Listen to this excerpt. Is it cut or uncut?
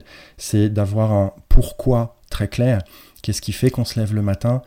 uncut